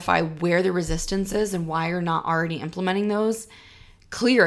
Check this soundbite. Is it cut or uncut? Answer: uncut